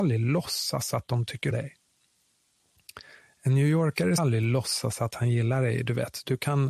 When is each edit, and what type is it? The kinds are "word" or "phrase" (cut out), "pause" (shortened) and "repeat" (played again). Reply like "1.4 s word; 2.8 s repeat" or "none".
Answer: 1.5 s word; 4.2 s word